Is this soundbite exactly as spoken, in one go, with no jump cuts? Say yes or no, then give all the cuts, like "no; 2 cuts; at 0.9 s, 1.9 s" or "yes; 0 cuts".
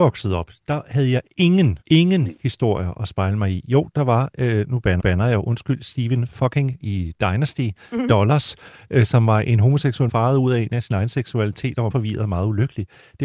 no; 5 cuts; at 1.8 s, 5.0 s, 6.8 s, 10.1 s, 11.9 s